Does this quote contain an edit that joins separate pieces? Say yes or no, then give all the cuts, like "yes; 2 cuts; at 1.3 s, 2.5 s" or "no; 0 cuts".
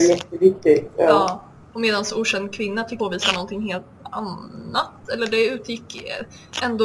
yes; 1 cut; at 3.0 s